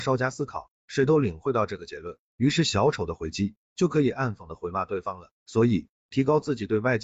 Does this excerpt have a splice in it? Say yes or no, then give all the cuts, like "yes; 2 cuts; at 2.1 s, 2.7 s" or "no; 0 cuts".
yes; 1 cut; at 5.4 s